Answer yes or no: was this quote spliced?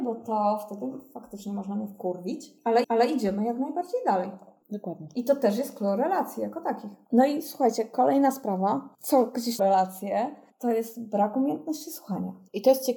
yes